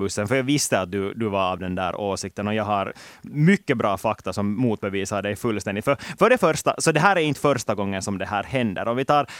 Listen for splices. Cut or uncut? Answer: uncut